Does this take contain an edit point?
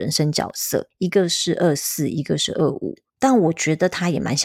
yes; 1 cut; at 3.1 s

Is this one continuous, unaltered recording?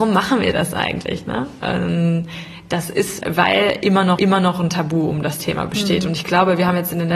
no; 2 cuts; at 3.2 s, 4.2 s

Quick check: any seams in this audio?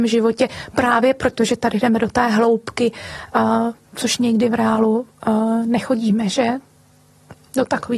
no; 0 cuts

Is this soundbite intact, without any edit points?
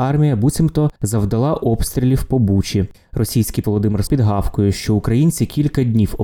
no; 3 cuts; at 1.0 s, 3.6 s, 4.1 s

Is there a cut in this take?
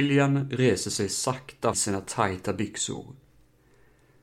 yes; 1 cut; at 1.7 s

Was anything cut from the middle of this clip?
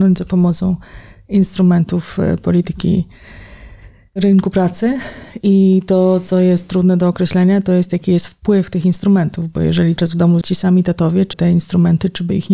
yes; 3 cuts; at 10.0 s, 10.4 s, 11.3 s

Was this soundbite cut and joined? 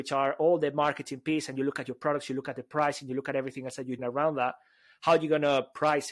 yes; 1 cut; at 4.0 s

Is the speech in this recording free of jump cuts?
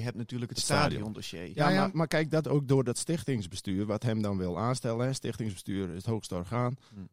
no; 1 cut; at 2.4 s

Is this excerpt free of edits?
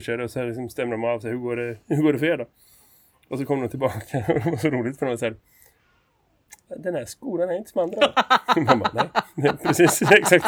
yes; 0 cuts

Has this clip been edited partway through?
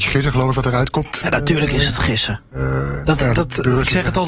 no; 0 cuts

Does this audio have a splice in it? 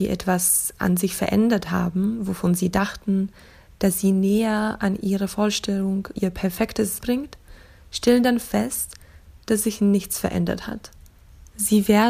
yes; 2 cuts; at 6.1 s, 7.0 s

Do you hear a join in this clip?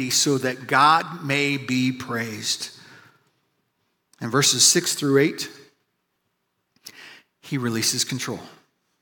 no; 0 cuts

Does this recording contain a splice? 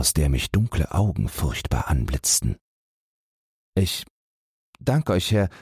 no; 0 cuts

